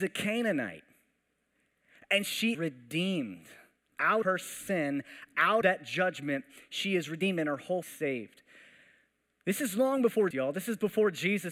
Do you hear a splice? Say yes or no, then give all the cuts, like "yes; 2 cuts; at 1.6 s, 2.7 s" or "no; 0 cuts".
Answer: yes; 5 cuts; at 2.5 s, 4.2 s, 5.6 s, 7.8 s, 10.3 s